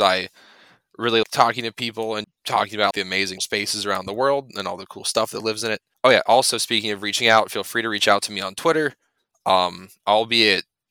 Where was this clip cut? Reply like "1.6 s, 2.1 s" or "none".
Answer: 1.2 s, 2.2 s, 2.9 s, 3.4 s